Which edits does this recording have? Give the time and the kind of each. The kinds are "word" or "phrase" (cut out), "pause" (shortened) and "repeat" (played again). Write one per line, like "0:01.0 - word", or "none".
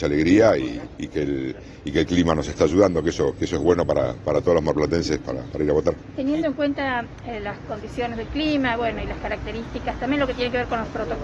none